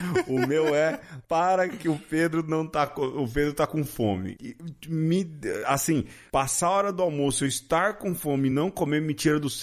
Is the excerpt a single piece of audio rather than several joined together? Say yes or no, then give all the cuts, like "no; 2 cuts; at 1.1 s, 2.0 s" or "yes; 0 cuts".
yes; 0 cuts